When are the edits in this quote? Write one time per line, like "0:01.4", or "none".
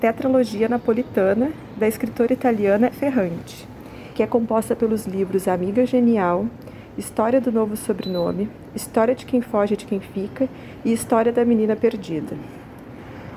0:02.9
0:04.2